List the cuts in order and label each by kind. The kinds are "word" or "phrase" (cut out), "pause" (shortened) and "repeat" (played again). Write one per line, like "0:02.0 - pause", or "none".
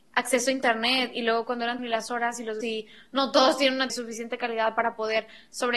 0:01.8 - word
0:02.6 - word
0:03.9 - phrase